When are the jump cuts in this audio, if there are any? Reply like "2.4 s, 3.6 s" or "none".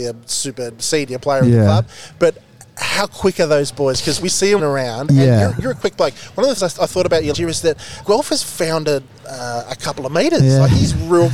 4.2 s, 4.6 s, 6.6 s, 7.3 s, 8.0 s, 9.2 s